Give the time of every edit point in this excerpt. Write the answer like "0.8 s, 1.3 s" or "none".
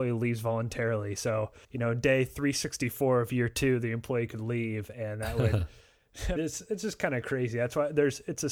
1.6 s, 6.4 s

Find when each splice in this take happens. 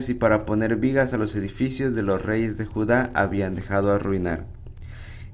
none

